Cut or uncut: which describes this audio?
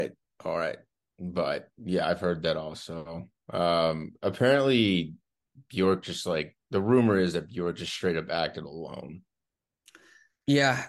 uncut